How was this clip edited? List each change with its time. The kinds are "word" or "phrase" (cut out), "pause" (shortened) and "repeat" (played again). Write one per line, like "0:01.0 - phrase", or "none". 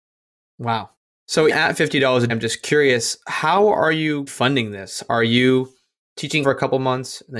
0:01.5 - word
0:02.3 - word
0:04.3 - word
0:06.4 - word